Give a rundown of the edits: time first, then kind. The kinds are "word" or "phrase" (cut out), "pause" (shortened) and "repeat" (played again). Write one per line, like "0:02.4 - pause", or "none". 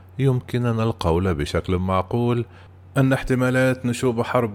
none